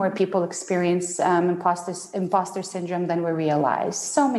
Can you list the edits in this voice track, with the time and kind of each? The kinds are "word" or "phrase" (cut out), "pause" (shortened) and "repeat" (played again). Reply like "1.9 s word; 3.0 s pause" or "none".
none